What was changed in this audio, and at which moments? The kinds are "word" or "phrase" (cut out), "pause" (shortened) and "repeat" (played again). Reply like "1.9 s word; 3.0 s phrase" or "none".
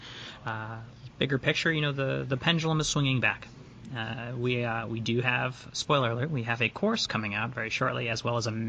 none